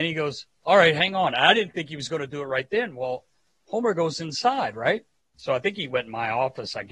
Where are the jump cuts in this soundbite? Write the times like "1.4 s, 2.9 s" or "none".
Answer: none